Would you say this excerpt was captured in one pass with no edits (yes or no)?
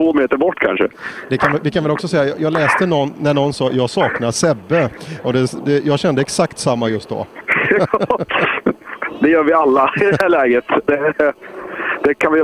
yes